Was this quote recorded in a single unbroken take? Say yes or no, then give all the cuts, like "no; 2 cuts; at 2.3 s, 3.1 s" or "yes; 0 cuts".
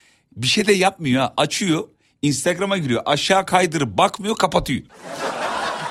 yes; 0 cuts